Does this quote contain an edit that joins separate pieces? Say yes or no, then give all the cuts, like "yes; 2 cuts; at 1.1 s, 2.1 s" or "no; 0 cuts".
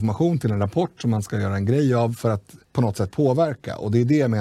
yes; 1 cut; at 2.6 s